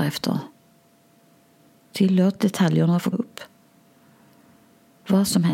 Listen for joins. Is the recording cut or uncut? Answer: cut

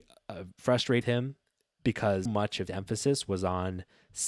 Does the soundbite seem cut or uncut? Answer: cut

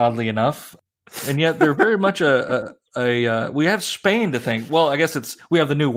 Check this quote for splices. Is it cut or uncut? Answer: uncut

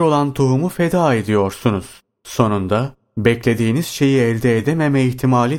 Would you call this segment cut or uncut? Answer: uncut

